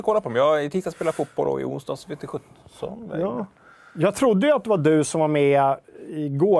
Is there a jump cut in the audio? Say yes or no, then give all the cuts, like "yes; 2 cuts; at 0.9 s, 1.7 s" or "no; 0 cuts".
no; 0 cuts